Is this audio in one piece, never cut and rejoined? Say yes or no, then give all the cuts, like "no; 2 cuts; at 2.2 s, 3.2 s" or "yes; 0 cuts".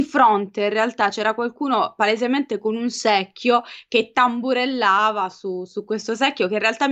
yes; 0 cuts